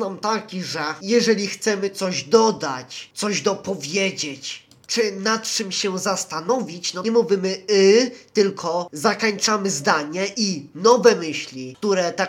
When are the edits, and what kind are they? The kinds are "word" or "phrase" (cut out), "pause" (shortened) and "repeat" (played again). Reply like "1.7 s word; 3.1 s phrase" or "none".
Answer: 7.0 s phrase